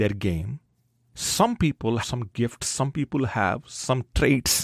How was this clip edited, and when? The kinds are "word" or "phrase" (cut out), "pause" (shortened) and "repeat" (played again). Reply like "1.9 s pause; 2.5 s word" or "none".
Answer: 2.0 s word